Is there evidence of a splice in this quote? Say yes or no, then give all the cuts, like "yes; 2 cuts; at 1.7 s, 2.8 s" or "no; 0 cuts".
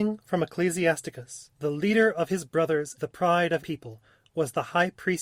yes; 3 cuts; at 1.5 s, 3.0 s, 3.6 s